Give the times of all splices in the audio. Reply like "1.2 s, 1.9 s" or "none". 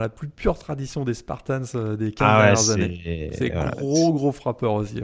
none